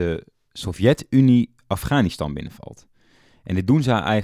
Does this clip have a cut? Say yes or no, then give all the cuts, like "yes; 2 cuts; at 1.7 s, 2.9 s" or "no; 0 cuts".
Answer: no; 0 cuts